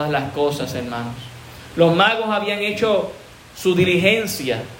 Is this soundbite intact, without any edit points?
yes; 0 cuts

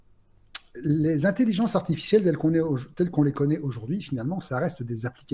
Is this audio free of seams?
yes; 0 cuts

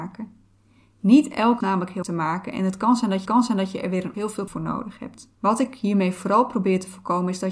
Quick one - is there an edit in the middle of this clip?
yes; 6 cuts; at 1.6 s, 2.0 s, 3.3 s, 4.1 s, 4.5 s, 5.4 s

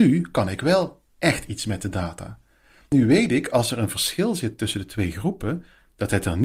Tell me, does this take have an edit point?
no; 0 cuts

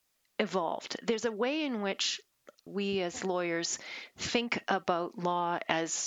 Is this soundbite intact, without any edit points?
no; 1 cut; at 2.7 s

